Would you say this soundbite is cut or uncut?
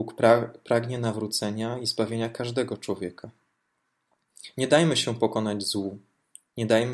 uncut